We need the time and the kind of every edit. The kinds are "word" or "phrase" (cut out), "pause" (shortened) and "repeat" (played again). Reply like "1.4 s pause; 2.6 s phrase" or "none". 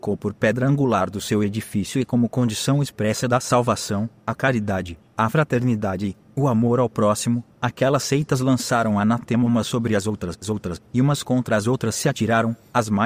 10.4 s repeat